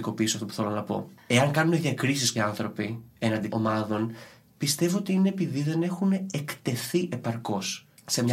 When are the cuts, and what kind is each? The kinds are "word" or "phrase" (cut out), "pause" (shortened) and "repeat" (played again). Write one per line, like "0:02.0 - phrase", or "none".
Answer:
0:02.3 - word
0:03.5 - word